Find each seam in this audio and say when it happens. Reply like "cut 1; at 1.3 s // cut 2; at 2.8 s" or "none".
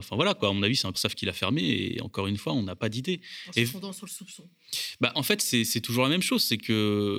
cut 1; at 0.9 s